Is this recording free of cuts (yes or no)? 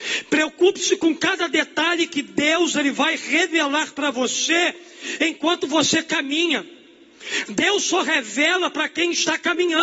yes